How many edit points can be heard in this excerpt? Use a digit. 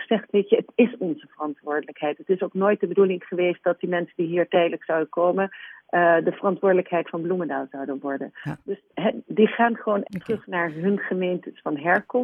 2